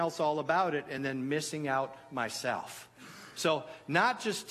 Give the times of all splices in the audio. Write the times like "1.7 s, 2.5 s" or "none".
none